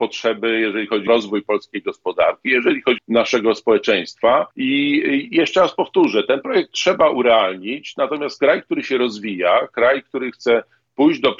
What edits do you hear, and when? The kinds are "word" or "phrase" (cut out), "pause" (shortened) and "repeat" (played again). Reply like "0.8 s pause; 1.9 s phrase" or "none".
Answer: 1.1 s word; 3.0 s phrase; 4.5 s pause